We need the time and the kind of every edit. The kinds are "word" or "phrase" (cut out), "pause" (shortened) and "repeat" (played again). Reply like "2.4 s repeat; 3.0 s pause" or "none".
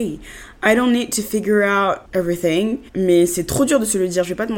2.9 s pause